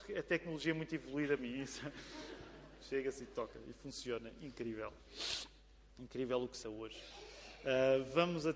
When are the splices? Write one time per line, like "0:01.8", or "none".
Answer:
0:01.4
0:06.6